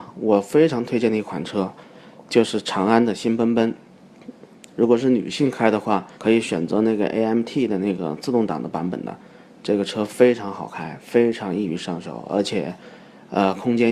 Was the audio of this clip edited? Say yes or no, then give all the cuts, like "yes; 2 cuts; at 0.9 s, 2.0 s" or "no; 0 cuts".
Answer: yes; 1 cut; at 6.1 s